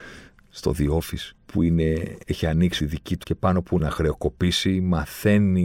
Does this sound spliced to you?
yes; 5 cuts; at 1.4 s, 2.2 s, 2.8 s, 3.2 s, 3.8 s

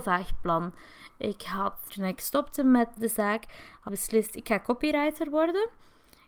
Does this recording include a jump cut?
yes; 3 cuts; at 1.9 s, 3.0 s, 3.9 s

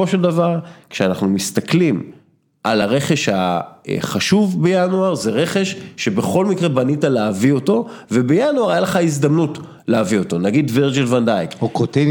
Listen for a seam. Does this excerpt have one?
no; 0 cuts

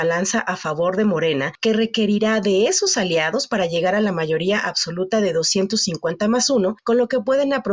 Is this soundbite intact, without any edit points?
yes; 0 cuts

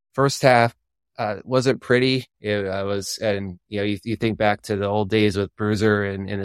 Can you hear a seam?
yes; 1 cut; at 2.3 s

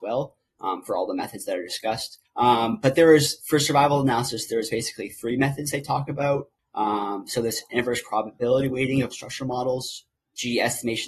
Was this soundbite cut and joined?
yes; 1 cut; at 9.1 s

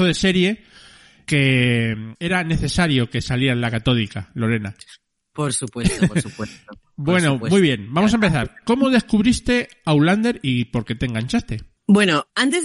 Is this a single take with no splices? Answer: yes; 0 cuts

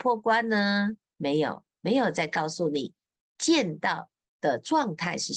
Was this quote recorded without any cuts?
yes; 0 cuts

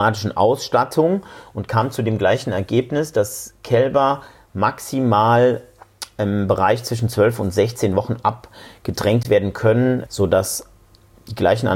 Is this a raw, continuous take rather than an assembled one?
yes; 0 cuts

